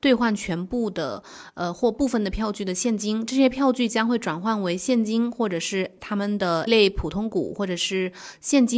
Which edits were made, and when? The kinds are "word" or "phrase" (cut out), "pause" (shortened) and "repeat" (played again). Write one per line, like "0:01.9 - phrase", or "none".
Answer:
0:06.7 - word

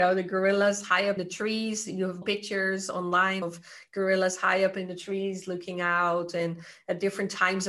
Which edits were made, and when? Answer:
0:01.2 - word
0:02.2 - word
0:03.4 - word

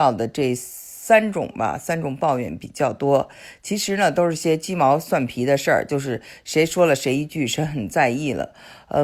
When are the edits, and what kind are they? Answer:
none

